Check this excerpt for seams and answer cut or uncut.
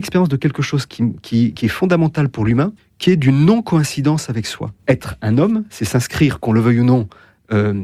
cut